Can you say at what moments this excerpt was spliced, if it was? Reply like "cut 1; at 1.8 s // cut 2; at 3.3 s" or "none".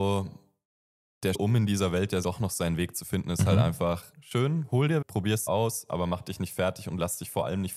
cut 1; at 1.3 s // cut 2; at 2.2 s // cut 3; at 4.1 s // cut 4; at 5.0 s // cut 5; at 5.5 s